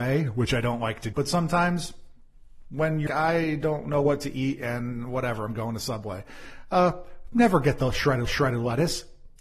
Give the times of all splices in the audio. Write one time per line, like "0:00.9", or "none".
0:01.1
0:03.1
0:08.2

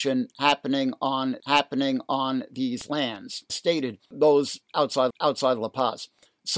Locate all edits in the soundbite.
0:01.4
0:03.5
0:04.1
0:05.1

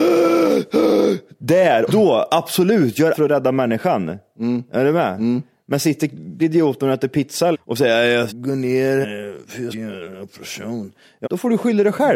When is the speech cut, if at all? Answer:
0:01.9
0:03.1
0:06.4
0:07.5
0:08.3
0:09.0
0:09.7
0:11.2

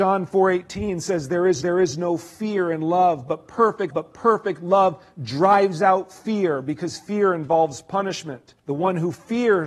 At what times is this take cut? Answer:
0:01.6
0:03.9
0:08.6

